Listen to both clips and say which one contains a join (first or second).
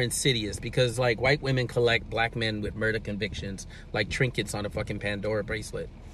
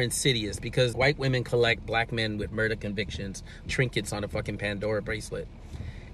second